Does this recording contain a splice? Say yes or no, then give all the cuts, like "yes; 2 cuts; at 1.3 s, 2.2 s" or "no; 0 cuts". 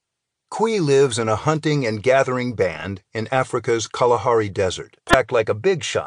yes; 1 cut; at 5.0 s